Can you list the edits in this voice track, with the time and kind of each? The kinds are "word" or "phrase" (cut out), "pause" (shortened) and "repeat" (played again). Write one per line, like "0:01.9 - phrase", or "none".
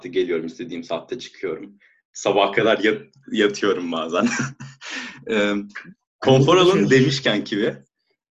none